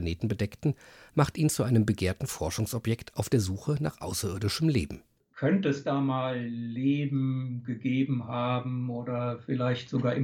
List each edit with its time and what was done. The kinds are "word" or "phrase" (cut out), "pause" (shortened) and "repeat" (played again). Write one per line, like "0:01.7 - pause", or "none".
none